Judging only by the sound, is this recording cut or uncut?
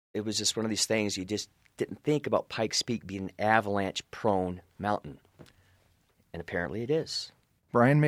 uncut